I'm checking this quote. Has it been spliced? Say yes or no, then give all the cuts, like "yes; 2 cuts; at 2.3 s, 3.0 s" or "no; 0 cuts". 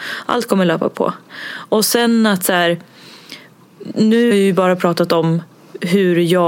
yes; 1 cut; at 4.3 s